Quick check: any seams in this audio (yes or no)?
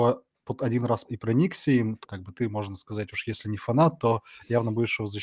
yes